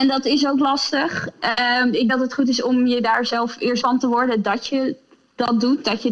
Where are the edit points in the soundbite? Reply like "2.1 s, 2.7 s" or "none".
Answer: 2.1 s, 3.8 s